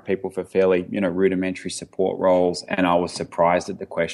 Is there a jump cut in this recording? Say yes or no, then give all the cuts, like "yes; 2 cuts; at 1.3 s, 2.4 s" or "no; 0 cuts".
no; 0 cuts